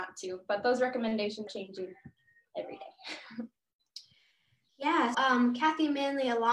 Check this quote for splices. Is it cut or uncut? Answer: cut